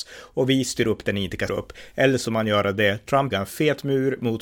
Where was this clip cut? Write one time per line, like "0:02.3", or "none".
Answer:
0:01.5
0:02.2
0:03.3